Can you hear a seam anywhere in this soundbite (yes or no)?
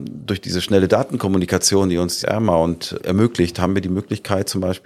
yes